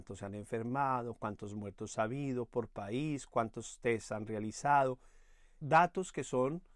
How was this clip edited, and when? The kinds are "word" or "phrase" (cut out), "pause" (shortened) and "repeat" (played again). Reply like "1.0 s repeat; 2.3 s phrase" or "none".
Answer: 5.6 s word